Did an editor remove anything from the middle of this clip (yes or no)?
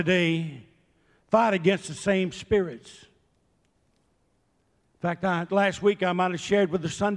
yes